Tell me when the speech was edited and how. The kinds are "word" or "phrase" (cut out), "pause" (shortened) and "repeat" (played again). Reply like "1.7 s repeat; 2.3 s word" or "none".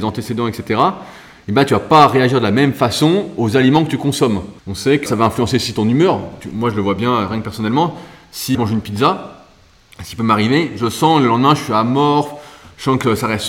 4.6 s pause; 5.1 s word; 8.5 s word

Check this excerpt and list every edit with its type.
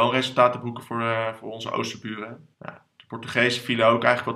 2.5 s pause

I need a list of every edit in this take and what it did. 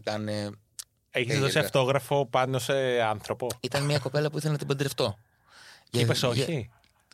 none

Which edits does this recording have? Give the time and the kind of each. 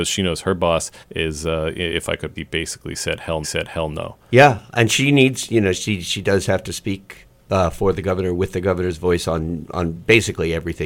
1.0 s pause; 2.4 s word; 3.4 s repeat

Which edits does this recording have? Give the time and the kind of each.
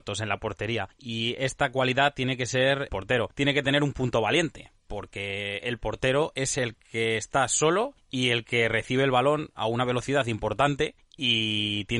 2.9 s phrase

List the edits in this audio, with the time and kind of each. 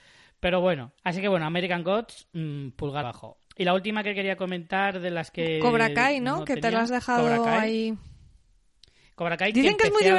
1.0 s pause; 3.0 s word; 3.4 s pause

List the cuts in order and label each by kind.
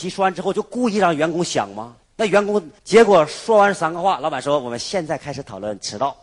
2.0 s pause; 2.8 s pause

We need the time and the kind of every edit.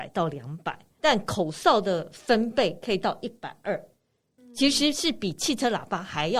1.0 s word; 4.4 s word

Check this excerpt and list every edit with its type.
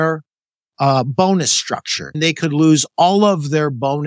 2.1 s word

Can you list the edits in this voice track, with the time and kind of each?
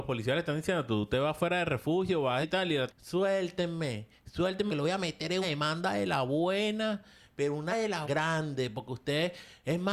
2.4 s word; 2.9 s word; 4.7 s word; 5.4 s word; 7.7 s word; 8.0 s word

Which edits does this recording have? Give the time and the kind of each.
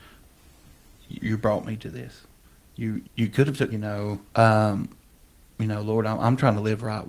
1.2 s word; 3.0 s word; 3.7 s phrase; 4.3 s pause

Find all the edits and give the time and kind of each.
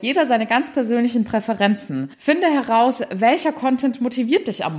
2.1 s pause

